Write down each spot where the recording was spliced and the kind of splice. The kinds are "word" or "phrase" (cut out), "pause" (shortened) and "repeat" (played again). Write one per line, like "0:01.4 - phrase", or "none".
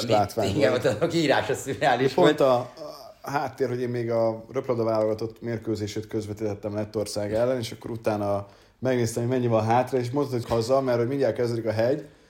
0:10.4 - word